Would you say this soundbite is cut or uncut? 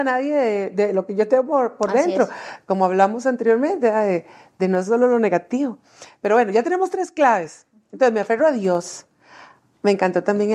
uncut